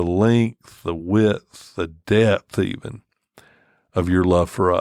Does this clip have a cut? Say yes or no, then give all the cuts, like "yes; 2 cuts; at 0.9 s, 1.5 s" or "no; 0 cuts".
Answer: no; 0 cuts